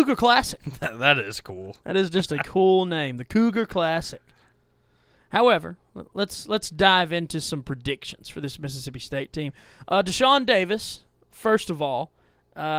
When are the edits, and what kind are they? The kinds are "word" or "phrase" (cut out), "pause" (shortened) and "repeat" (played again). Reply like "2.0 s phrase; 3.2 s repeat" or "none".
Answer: none